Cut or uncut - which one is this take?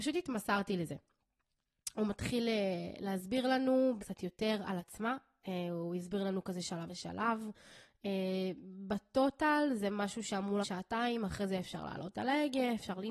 cut